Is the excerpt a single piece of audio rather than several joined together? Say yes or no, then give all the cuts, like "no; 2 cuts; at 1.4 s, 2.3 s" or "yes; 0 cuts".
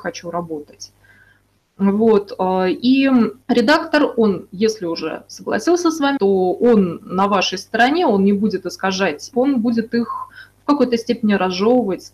no; 3 cuts; at 3.4 s, 6.2 s, 9.3 s